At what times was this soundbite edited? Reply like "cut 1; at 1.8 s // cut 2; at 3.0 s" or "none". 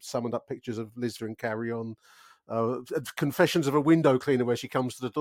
cut 1; at 1.2 s

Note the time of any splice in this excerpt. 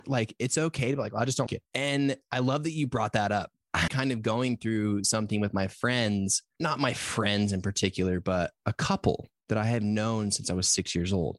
cut 1; at 1.5 s // cut 2; at 3.9 s

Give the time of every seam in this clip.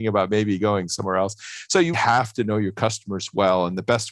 cut 1; at 1.9 s

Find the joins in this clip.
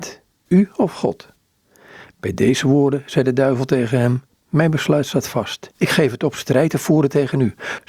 none

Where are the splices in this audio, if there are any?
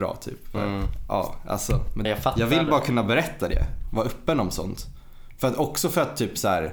cut 1; at 2.0 s

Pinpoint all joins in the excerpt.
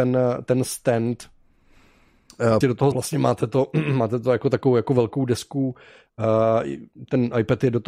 cut 1; at 2.6 s // cut 2; at 2.9 s

